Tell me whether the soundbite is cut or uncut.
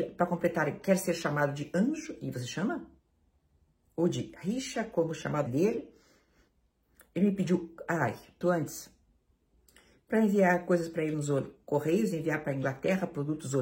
cut